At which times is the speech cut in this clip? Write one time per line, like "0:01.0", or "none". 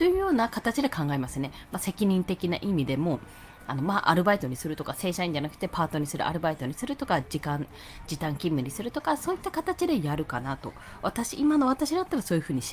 none